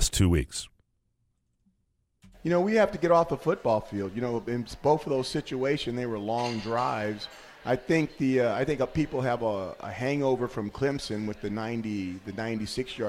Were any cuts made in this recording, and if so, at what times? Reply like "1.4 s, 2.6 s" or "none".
none